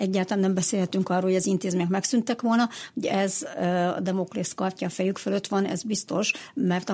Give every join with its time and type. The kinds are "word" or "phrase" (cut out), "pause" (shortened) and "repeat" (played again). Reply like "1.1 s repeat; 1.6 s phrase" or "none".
3.0 s word